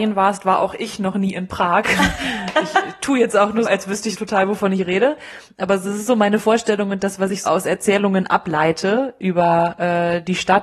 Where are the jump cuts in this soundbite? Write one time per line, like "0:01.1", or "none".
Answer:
0:03.6
0:04.1
0:07.5